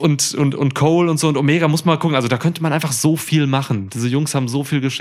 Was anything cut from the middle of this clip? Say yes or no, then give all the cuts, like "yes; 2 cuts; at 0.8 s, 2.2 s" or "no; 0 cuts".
no; 0 cuts